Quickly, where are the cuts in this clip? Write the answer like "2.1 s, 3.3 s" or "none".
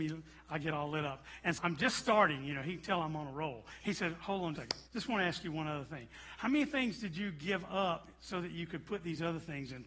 1.6 s, 4.6 s, 4.9 s

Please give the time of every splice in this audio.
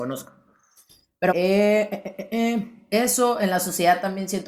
1.3 s

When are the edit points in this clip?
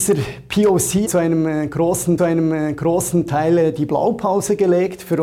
1.0 s, 2.2 s

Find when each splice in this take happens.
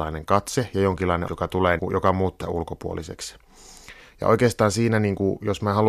1.3 s, 1.8 s, 2.4 s

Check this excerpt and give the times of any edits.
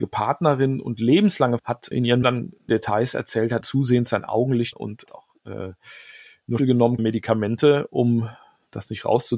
1.6 s, 1.9 s, 2.2 s, 2.7 s, 3.6 s, 4.7 s, 5.1 s, 6.6 s, 7.0 s

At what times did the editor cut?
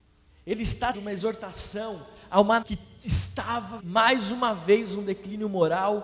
0.9 s, 2.6 s, 3.8 s

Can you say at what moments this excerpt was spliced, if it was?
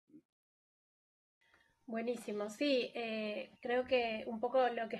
3.6 s

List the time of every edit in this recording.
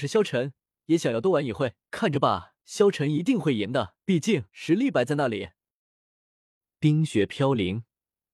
1.8 s, 2.6 s, 4.0 s, 4.5 s

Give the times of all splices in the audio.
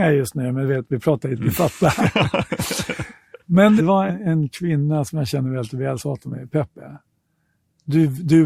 1.4 s, 3.8 s, 4.1 s, 6.0 s

